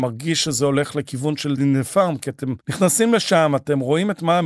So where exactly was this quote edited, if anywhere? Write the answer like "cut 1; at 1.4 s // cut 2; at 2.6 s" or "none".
cut 1; at 1.6 s // cut 2; at 2.6 s